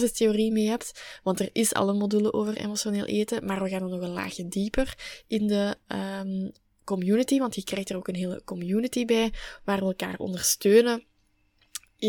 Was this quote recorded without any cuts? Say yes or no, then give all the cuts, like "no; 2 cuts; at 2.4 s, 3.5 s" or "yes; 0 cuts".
yes; 0 cuts